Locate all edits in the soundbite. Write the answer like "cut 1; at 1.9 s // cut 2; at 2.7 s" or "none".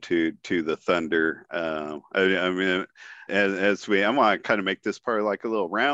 cut 1; at 3.3 s